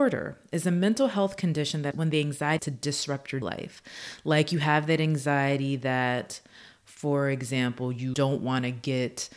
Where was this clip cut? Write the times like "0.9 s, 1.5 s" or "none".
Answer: 1.9 s, 2.6 s, 3.4 s, 8.1 s